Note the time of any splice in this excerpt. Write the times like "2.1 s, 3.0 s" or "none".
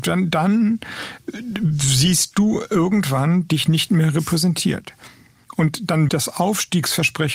6.1 s